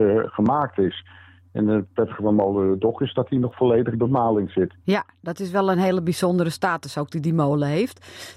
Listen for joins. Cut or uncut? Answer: cut